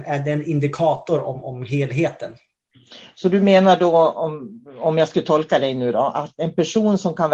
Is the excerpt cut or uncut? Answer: uncut